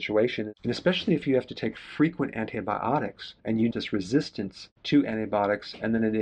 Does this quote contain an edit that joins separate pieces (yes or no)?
yes